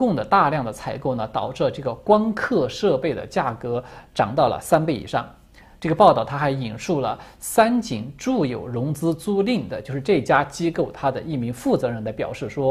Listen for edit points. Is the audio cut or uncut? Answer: uncut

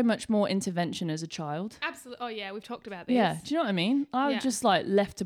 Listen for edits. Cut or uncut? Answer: uncut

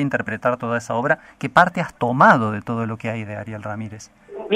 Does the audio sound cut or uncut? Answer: uncut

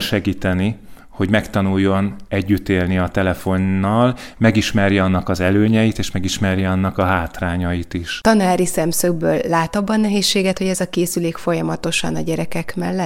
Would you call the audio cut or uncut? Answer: uncut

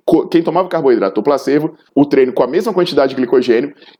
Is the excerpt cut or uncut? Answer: cut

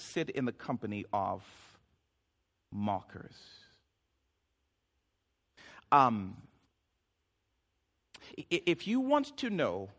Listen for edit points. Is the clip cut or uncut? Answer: uncut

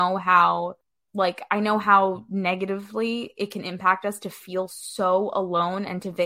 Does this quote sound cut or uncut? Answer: uncut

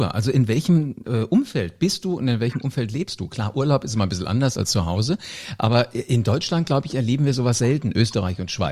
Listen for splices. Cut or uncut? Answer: uncut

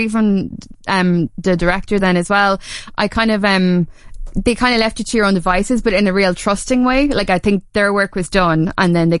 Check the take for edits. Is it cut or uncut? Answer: uncut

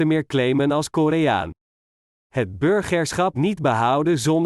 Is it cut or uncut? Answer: cut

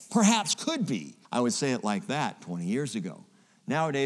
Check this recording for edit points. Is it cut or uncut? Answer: cut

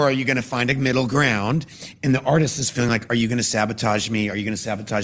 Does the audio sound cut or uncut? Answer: uncut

